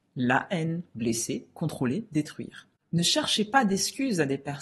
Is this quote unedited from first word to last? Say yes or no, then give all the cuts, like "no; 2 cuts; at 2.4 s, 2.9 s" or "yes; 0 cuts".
yes; 0 cuts